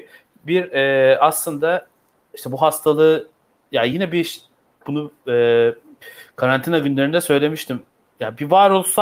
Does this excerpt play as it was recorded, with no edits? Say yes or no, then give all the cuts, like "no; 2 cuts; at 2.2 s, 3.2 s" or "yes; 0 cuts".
yes; 0 cuts